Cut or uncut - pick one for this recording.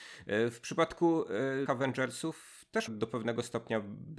cut